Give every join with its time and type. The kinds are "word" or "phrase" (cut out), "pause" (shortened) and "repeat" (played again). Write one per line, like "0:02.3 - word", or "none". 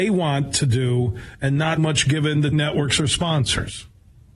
0:01.8 - word
0:02.5 - word